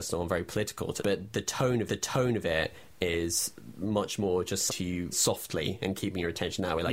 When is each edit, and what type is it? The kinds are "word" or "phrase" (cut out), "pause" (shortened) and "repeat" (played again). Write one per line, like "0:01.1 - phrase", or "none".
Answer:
0:01.0 - word
0:01.9 - repeat
0:04.7 - phrase
0:05.1 - word